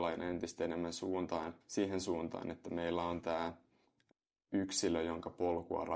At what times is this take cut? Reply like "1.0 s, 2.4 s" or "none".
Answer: 1.6 s

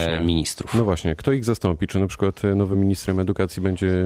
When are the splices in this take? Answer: none

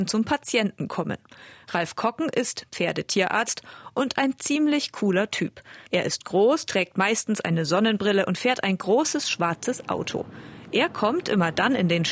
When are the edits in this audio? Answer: 5.9 s

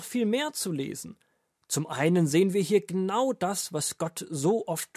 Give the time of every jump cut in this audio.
none

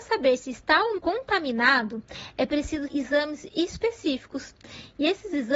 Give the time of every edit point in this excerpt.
1.0 s, 2.9 s

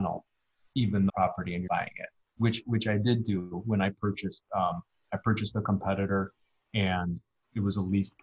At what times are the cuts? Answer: 1.1 s, 1.7 s

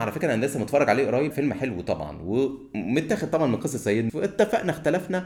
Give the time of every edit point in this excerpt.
1.3 s, 4.1 s

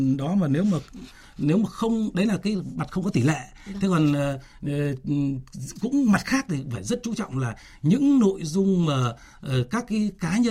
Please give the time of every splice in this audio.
none

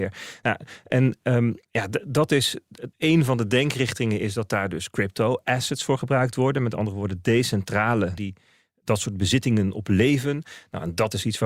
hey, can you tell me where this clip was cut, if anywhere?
1.6 s, 2.9 s, 8.2 s

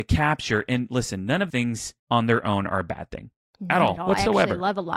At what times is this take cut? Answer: 1.5 s, 2.0 s

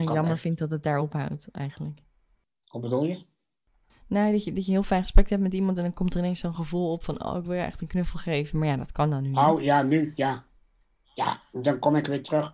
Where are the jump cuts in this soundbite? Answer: none

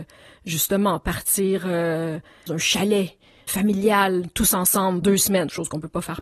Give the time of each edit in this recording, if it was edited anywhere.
2.5 s, 3.5 s, 5.0 s

